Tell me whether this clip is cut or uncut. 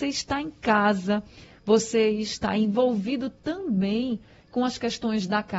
uncut